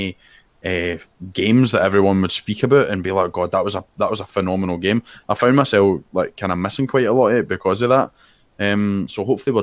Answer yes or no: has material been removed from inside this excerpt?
no